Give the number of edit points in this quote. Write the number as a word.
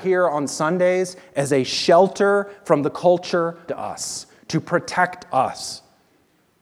one